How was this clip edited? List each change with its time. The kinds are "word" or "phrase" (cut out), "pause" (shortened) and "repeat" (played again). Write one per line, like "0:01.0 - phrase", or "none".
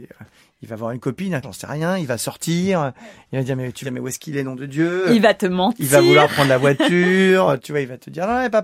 0:01.4 - word
0:03.8 - phrase